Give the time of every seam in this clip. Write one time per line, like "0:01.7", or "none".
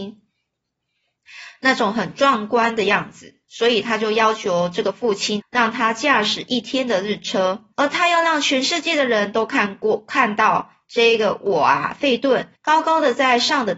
0:03.4
0:05.4
0:07.7
0:12.6